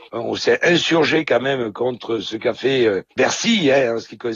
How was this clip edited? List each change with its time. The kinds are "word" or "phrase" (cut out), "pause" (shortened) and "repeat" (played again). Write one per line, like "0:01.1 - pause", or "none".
0:03.1 - pause